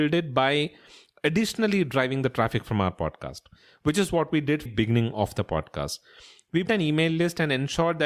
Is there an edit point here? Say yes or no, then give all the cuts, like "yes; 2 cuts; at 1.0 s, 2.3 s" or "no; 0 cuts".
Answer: yes; 2 cuts; at 4.7 s, 6.7 s